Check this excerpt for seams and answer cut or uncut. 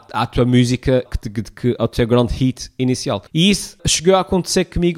cut